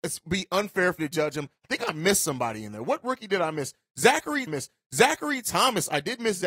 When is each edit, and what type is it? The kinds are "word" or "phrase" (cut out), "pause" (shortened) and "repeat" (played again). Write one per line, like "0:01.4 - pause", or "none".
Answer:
0:01.0 - word
0:04.5 - repeat